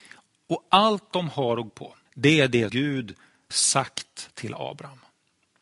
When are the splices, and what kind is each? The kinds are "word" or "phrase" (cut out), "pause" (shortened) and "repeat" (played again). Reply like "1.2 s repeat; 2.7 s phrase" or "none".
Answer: 1.7 s word; 2.1 s pause; 2.7 s word; 3.5 s word